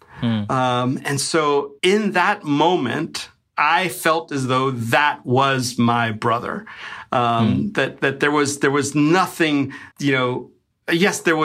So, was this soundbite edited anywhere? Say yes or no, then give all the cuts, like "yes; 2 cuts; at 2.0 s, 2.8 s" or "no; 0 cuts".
yes; 3 cuts; at 1.8 s, 3.5 s, 9.9 s